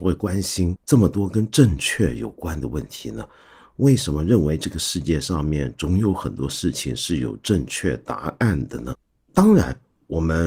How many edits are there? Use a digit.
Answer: 0